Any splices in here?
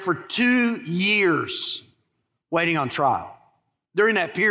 no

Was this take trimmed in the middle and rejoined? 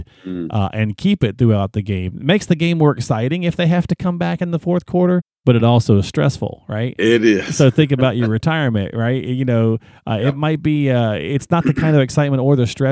no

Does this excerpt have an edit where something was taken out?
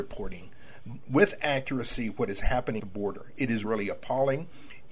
yes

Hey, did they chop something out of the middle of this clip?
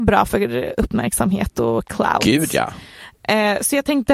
no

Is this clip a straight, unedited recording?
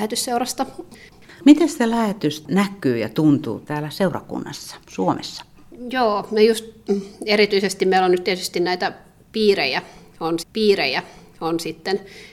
no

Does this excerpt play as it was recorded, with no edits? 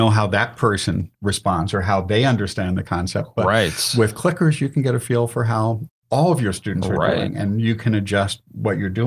yes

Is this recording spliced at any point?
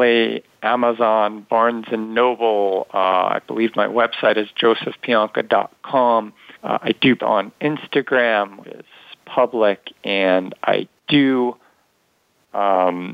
yes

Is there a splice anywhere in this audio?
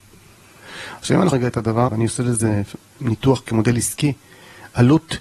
yes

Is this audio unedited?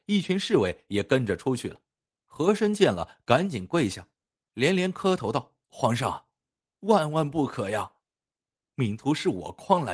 no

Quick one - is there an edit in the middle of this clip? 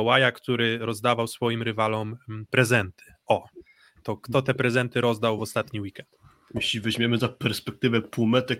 no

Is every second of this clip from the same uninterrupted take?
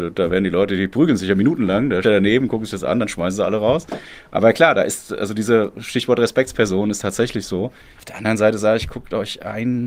no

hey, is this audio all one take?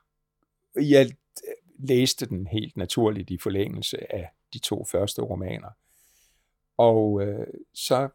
yes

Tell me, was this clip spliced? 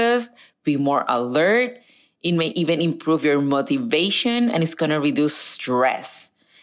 no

